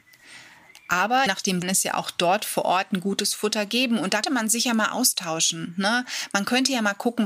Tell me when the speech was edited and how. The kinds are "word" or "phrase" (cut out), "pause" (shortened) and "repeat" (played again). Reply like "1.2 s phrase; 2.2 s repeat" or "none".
1.3 s word; 1.6 s phrase; 4.2 s word